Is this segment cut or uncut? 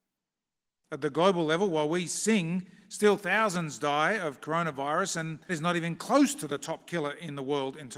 cut